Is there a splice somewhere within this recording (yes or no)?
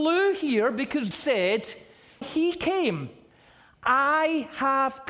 yes